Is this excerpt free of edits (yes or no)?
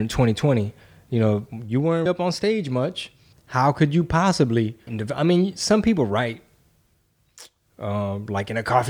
no